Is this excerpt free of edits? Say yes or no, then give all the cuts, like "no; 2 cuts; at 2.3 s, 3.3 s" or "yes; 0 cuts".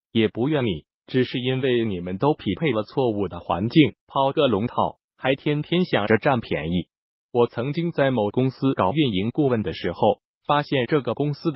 no; 1 cut; at 4.0 s